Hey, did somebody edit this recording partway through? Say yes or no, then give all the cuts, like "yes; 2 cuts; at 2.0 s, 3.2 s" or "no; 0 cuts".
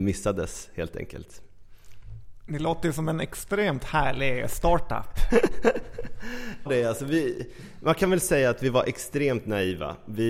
yes; 1 cut; at 6.7 s